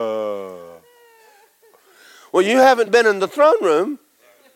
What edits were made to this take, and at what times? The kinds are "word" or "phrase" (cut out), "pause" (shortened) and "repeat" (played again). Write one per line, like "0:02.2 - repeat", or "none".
none